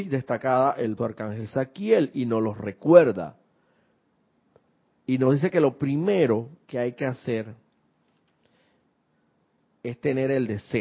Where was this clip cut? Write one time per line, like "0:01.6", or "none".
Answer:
0:01.0